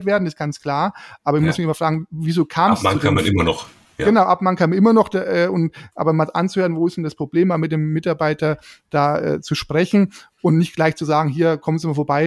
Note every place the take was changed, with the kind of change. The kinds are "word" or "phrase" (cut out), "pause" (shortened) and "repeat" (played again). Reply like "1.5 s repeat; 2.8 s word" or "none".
none